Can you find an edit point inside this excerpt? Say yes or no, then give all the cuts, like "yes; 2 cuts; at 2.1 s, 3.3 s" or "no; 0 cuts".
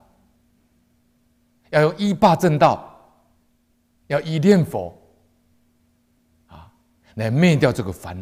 no; 0 cuts